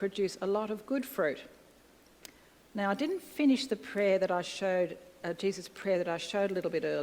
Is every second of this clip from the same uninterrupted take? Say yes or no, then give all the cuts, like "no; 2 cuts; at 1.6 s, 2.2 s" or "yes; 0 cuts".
yes; 0 cuts